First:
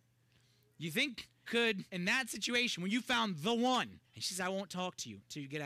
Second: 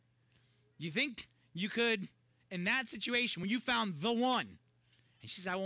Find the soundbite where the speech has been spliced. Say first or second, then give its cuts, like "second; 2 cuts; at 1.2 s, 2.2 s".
first; 3 cuts; at 1.5 s, 1.9 s, 4.0 s